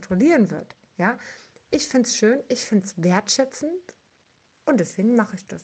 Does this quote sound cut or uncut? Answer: uncut